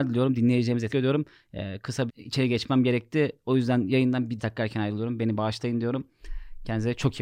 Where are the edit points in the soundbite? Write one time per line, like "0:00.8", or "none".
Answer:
0:00.9
0:02.1
0:04.4